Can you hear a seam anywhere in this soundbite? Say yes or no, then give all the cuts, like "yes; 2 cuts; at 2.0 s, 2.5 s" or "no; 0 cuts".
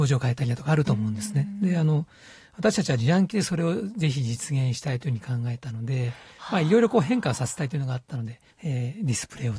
yes; 1 cut; at 8.5 s